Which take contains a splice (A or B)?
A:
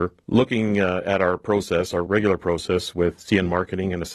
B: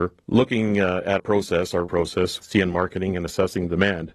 B